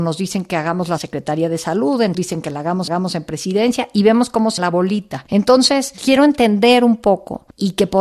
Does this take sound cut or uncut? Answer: cut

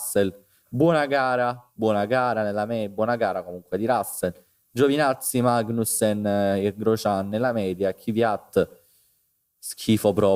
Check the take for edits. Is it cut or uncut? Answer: uncut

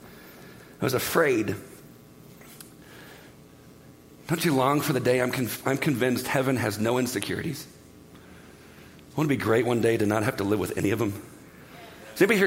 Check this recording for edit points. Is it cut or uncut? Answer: uncut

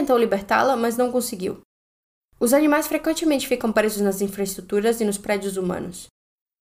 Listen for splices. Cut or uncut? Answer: uncut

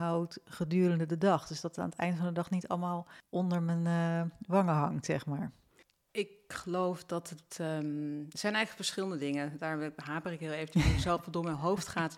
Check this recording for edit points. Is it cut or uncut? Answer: uncut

